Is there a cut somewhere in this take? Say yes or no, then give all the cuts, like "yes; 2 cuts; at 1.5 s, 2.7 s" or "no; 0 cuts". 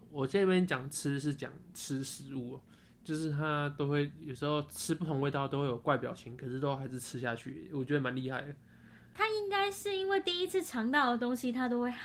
no; 0 cuts